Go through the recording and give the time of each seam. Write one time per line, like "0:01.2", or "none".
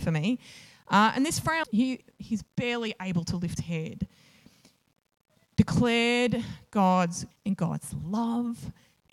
0:01.6
0:03.6
0:07.3